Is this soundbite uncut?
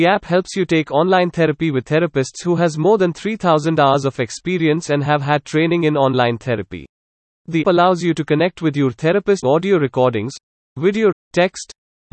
no; 4 cuts; at 1.8 s, 7.6 s, 9.4 s, 11.1 s

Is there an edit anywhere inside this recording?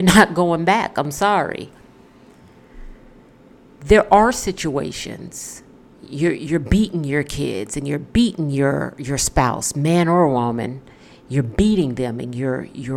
no; 0 cuts

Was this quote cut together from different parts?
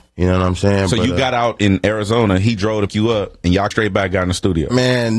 yes; 2 cuts; at 2.9 s, 3.7 s

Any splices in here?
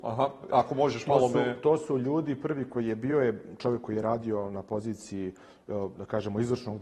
no; 0 cuts

